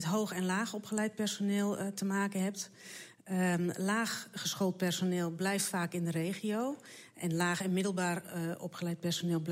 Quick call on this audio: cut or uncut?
uncut